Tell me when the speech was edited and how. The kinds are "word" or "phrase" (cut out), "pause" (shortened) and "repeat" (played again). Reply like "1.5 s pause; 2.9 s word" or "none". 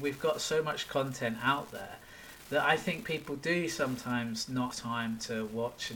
4.7 s word